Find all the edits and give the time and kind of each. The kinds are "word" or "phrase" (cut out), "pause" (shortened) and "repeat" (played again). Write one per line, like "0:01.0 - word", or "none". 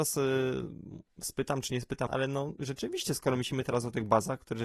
0:02.1 - word